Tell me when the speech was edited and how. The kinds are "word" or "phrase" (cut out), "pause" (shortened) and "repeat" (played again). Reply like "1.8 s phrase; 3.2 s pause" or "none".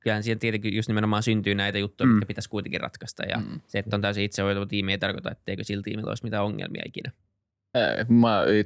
none